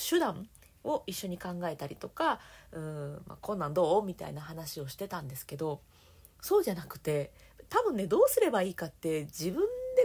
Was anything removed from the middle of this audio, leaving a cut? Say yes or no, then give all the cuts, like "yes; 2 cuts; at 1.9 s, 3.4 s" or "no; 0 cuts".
yes; 1 cut; at 6.3 s